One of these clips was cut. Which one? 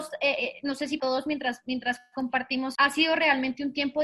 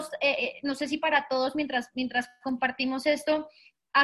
first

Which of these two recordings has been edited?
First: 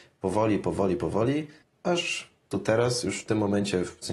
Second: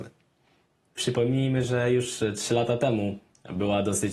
first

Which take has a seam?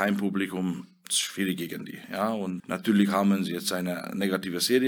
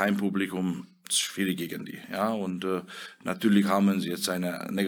first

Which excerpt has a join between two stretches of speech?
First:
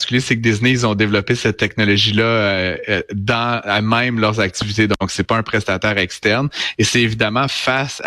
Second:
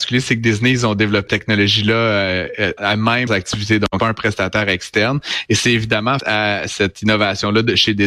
second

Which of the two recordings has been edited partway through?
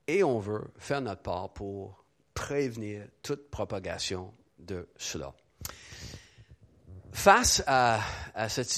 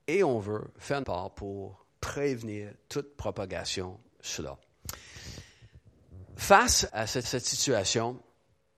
second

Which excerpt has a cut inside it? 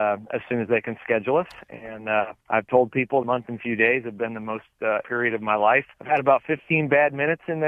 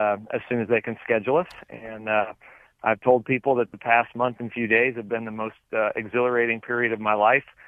first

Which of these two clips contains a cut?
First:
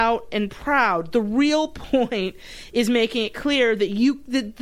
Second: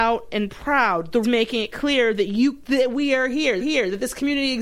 second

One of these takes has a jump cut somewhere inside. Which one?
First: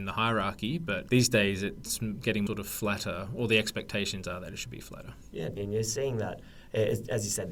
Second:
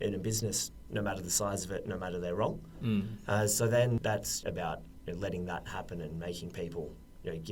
first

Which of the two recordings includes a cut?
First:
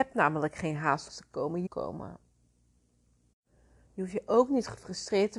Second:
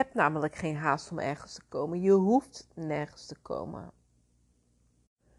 first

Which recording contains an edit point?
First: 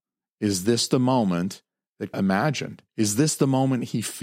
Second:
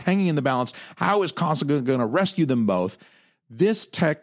first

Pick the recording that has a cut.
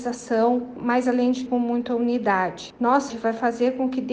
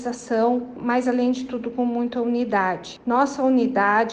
first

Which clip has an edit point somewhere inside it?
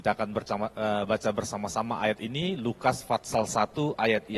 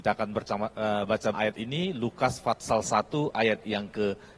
second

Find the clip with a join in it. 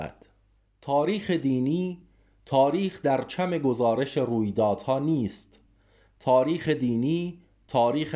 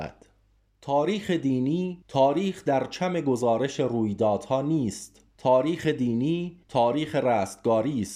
second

